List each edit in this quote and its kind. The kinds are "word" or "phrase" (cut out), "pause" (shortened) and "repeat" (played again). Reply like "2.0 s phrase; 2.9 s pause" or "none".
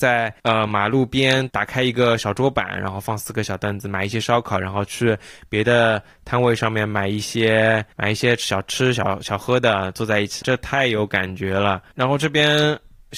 7.9 s pause; 10.4 s word